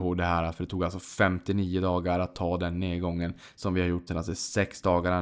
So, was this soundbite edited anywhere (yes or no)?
yes